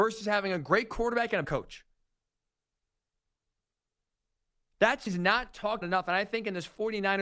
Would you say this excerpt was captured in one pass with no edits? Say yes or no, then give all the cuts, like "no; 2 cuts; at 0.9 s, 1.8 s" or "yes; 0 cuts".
no; 3 cuts; at 1.4 s, 5.1 s, 5.8 s